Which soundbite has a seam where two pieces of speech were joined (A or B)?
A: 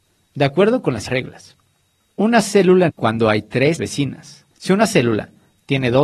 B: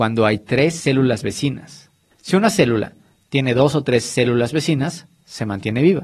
A